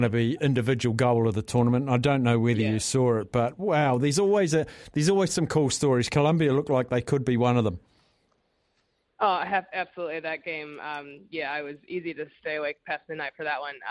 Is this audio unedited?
yes; 0 cuts

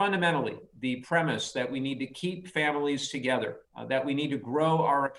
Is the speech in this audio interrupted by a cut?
yes; 1 cut; at 3.6 s

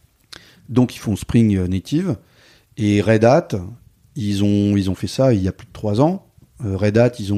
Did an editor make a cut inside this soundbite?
no; 0 cuts

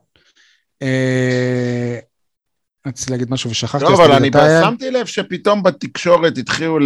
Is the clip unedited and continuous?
yes; 0 cuts

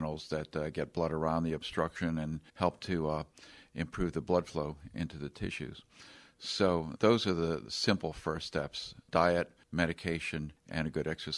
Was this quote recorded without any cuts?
no; 1 cut; at 2.5 s

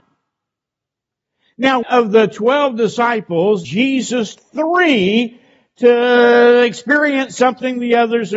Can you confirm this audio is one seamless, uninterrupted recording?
no; 3 cuts; at 1.8 s, 3.6 s, 4.3 s

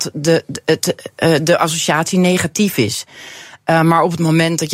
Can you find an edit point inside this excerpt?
no; 0 cuts

